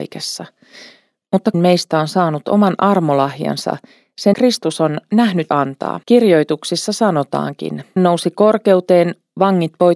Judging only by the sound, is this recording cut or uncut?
cut